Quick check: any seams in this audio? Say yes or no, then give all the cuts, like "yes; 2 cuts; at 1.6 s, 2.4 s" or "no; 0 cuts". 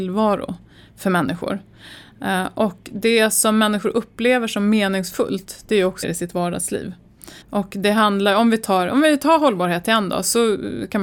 yes; 2 cuts; at 6.0 s, 7.4 s